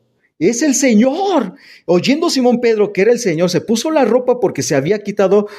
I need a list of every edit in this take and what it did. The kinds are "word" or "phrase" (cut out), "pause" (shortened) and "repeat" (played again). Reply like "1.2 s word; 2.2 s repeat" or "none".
none